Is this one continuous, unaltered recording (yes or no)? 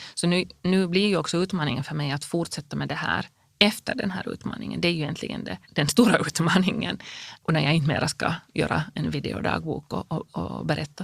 no